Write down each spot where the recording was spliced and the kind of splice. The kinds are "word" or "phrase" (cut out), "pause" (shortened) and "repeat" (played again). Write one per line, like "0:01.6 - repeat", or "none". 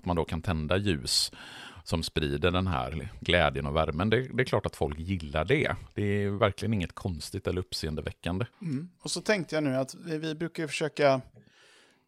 0:08.5 - pause

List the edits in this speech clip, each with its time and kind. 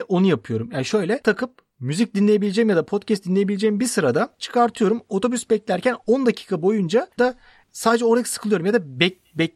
0:01.2 - word
0:04.4 - word
0:07.2 - phrase

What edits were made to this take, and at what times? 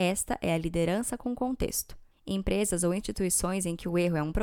0:02.1 - pause

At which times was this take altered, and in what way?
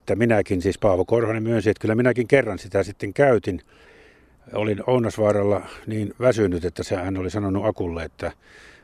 none

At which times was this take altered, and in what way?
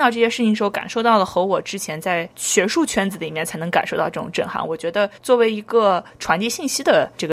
0:05.2 - pause

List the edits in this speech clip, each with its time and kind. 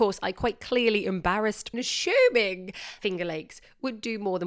0:01.7 - phrase
0:03.0 - word

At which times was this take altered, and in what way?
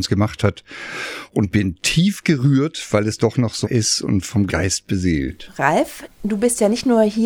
0:03.6 - word
0:04.5 - word

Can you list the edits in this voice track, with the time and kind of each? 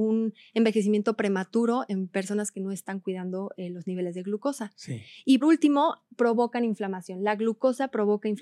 0:05.4 - word
0:06.1 - pause

